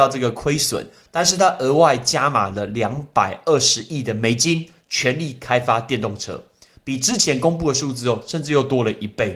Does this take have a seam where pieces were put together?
no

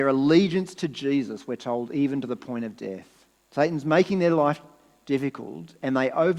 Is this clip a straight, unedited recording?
no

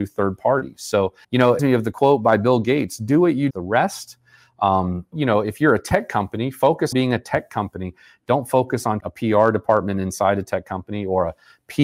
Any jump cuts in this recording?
yes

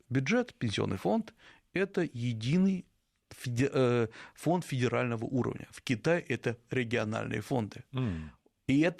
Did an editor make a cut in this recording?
no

